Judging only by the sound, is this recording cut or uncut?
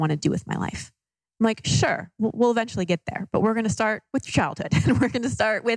uncut